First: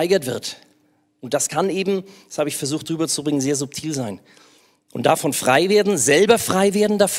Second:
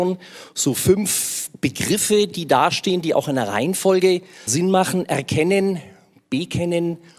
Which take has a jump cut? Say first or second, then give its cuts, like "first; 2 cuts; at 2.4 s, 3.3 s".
second; 1 cut; at 4.5 s